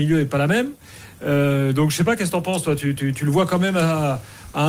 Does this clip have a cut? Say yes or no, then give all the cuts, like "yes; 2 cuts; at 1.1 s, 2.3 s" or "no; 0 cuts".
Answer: no; 0 cuts